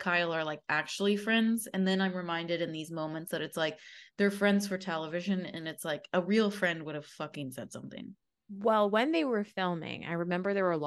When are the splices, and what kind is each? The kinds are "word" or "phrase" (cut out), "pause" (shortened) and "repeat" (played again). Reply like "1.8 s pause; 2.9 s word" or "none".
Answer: none

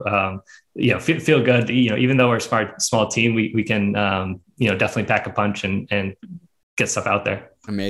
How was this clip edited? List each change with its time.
none

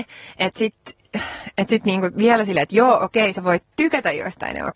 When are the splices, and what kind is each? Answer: none

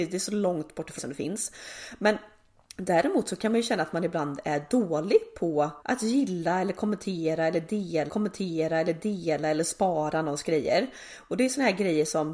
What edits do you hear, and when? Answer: 1.0 s word; 5.8 s pause; 8.1 s repeat

